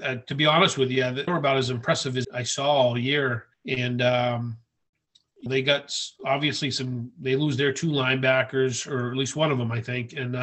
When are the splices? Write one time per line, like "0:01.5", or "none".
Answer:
0:01.3
0:02.2
0:03.5
0:05.5